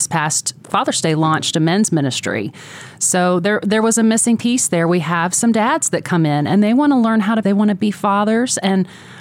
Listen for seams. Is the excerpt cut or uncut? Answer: cut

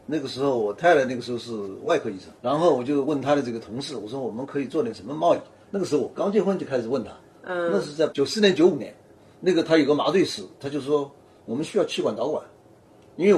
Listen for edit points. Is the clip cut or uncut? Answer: cut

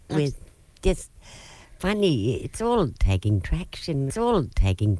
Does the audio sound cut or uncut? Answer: cut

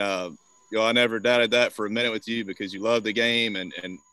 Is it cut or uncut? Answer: uncut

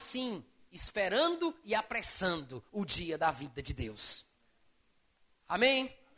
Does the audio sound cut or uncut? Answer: uncut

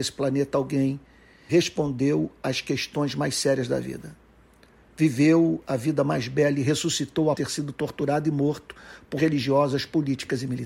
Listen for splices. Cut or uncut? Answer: cut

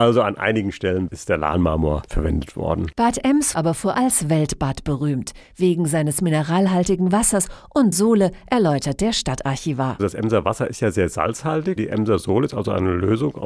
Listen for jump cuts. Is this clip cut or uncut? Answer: cut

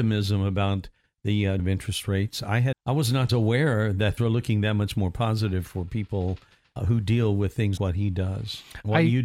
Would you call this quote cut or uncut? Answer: cut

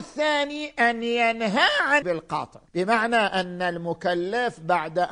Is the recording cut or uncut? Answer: cut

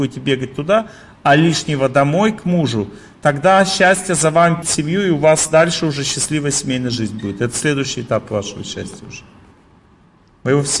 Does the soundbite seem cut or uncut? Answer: cut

